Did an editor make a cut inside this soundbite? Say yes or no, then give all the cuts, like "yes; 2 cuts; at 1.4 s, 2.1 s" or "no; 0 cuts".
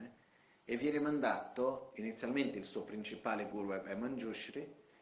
no; 0 cuts